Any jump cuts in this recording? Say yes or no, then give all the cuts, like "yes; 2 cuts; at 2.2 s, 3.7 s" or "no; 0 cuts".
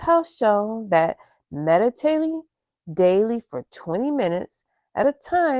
no; 0 cuts